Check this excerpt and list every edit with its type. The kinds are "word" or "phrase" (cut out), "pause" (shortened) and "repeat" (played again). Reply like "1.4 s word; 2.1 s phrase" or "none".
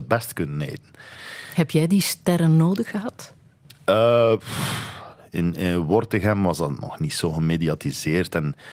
none